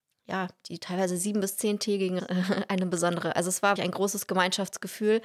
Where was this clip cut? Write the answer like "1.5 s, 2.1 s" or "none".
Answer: 2.2 s, 3.8 s

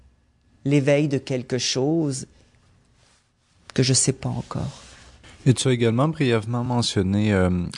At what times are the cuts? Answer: none

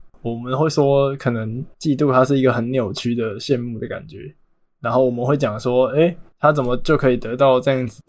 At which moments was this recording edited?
none

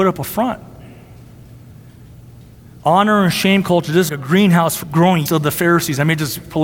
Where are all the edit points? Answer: 4.1 s, 4.8 s, 5.3 s

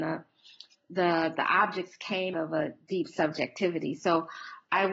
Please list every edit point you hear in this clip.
2.3 s

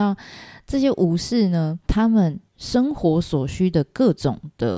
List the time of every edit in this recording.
1.9 s, 2.5 s

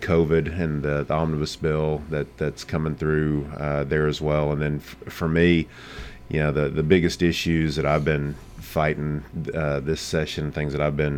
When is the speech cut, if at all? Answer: none

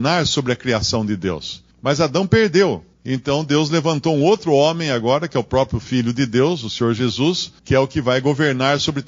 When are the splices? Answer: 1.7 s, 2.9 s, 7.6 s

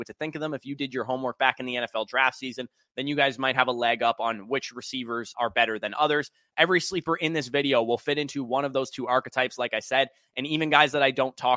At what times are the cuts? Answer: 5.3 s

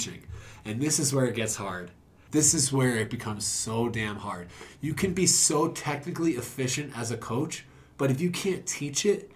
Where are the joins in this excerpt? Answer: none

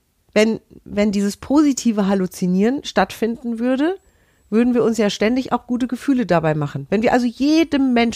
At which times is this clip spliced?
none

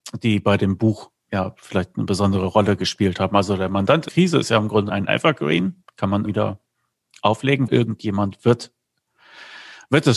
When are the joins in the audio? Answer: 1.3 s, 4.1 s, 4.9 s, 6.2 s, 7.7 s

